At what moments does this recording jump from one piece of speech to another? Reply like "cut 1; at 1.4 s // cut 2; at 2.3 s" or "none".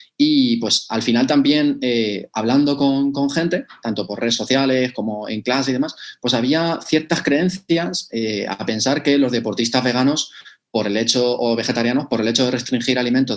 none